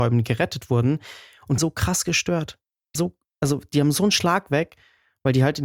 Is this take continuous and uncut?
no; 2 cuts; at 1.6 s, 3.0 s

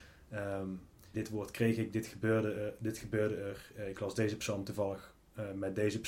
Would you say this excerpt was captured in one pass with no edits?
no; 1 cut; at 1.1 s

